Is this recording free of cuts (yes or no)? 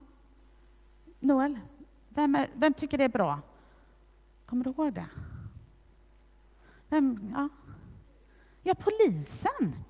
yes